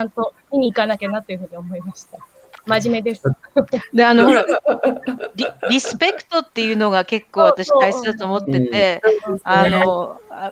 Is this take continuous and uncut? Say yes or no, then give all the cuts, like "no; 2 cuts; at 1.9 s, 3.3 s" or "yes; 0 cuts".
no; 1 cut; at 6.5 s